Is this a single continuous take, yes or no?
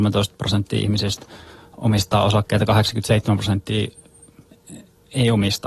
yes